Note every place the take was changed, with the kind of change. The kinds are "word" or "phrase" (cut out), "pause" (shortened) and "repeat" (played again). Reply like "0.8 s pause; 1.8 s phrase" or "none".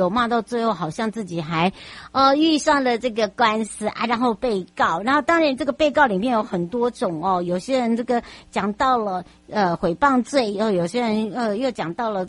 none